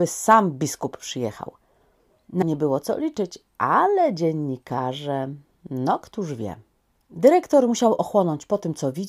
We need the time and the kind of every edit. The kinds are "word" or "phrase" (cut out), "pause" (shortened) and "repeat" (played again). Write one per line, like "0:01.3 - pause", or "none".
0:02.4 - phrase